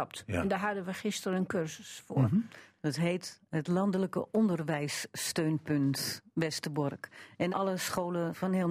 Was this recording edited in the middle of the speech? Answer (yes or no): yes